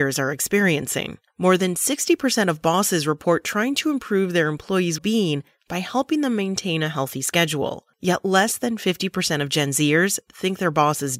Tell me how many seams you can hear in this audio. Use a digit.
2